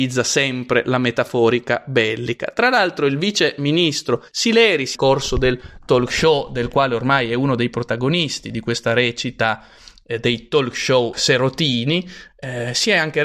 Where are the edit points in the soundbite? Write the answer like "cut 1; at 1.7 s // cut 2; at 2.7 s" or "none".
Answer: cut 1; at 4.3 s // cut 2; at 4.9 s // cut 3; at 11.1 s